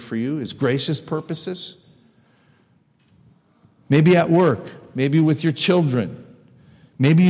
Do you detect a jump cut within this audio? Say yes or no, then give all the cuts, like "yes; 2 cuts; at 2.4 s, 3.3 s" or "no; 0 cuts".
no; 0 cuts